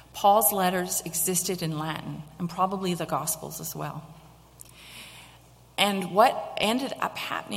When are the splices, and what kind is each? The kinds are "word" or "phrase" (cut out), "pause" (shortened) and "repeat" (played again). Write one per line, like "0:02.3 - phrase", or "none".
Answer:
none